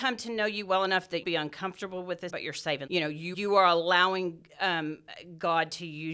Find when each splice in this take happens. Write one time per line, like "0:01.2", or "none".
0:01.2
0:02.3
0:02.9
0:03.3